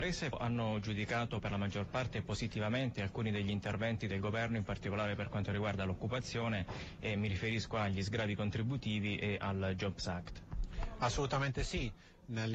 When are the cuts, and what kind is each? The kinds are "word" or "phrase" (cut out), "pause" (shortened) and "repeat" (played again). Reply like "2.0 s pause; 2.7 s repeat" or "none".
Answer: none